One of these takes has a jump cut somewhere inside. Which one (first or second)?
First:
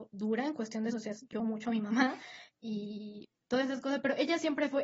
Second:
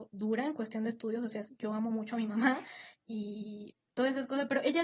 first